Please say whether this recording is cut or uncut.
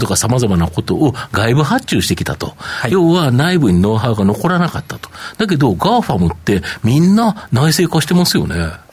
uncut